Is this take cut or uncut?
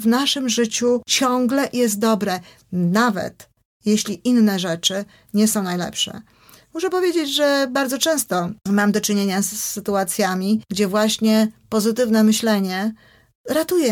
uncut